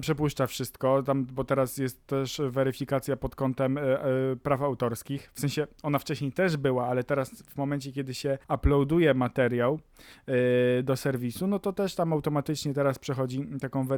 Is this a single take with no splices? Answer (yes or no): no